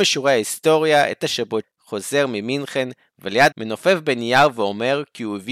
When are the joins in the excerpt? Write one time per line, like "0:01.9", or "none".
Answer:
0:01.2
0:01.6
0:03.5